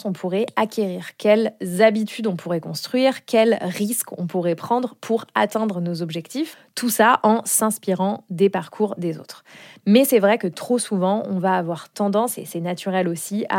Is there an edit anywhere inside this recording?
no; 0 cuts

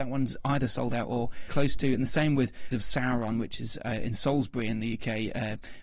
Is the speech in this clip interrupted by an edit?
yes; 2 cuts; at 1.5 s, 2.7 s

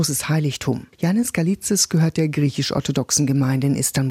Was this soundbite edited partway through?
yes; 1 cut; at 0.9 s

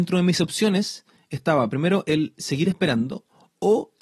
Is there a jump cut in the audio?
no; 0 cuts

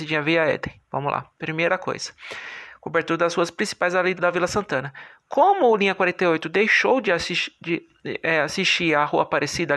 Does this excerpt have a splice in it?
yes; 1 cut; at 4.2 s

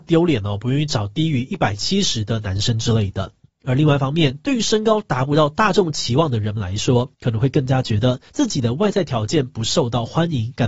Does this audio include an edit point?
yes; 3 cuts; at 3.5 s, 7.1 s, 8.3 s

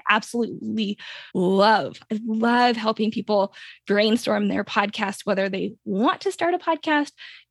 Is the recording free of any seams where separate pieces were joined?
no; 1 cut; at 1.3 s

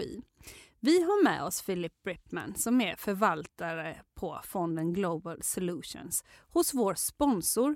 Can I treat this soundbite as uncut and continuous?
yes; 0 cuts

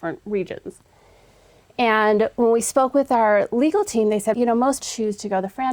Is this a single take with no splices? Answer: no; 2 cuts; at 4.3 s, 4.8 s

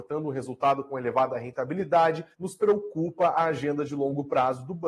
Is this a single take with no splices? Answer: no; 1 cut; at 2.3 s

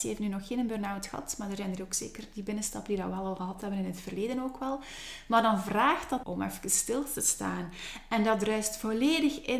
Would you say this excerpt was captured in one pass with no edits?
no; 1 cut; at 6.2 s

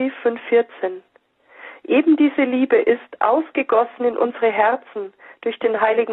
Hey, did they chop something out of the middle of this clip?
no; 0 cuts

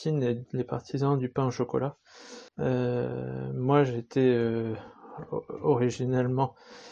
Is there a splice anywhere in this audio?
yes; 1 cut; at 2.5 s

